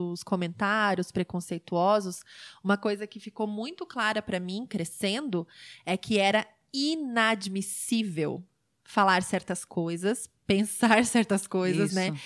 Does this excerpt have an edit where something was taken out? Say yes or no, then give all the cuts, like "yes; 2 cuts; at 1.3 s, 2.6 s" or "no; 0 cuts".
no; 0 cuts